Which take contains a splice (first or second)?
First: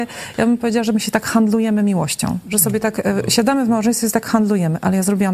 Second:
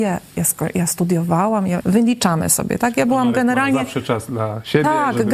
second